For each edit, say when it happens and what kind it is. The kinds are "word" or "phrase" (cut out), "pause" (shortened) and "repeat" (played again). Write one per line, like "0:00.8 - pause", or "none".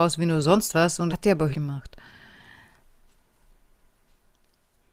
0:01.1 - phrase
0:01.5 - word

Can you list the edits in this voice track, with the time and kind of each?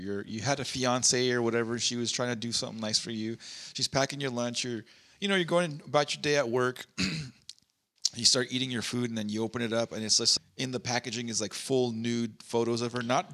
0:10.4 - word

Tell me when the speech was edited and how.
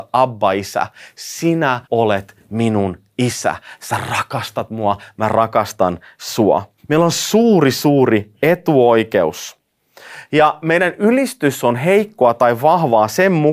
0:01.8 - pause
0:06.8 - pause

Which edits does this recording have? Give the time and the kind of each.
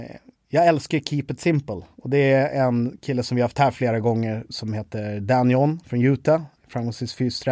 0:06.6 - pause

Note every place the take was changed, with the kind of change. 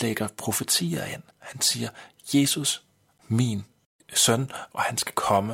0:01.3 - pause
0:03.2 - word

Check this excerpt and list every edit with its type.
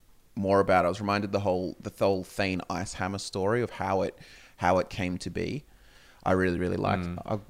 none

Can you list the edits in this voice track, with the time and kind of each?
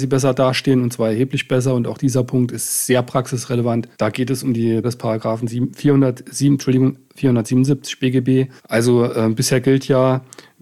0:03.9 - pause
0:04.8 - word
0:08.6 - pause

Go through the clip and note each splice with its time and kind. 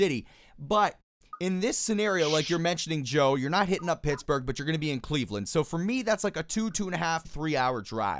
0:07.2 - word

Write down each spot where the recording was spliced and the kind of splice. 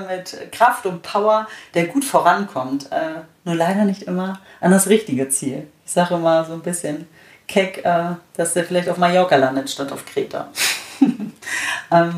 none

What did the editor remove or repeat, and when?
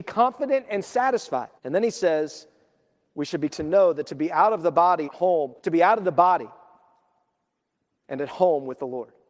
0:01.6 - pause
0:03.5 - phrase
0:05.0 - word
0:05.6 - pause

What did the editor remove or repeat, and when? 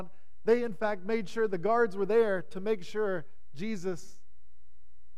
none

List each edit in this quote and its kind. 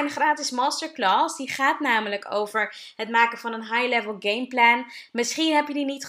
none

